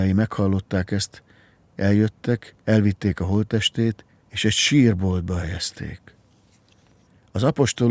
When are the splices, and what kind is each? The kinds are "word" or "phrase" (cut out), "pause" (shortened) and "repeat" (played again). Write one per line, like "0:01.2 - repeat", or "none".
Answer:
0:02.6 - pause
0:04.1 - pause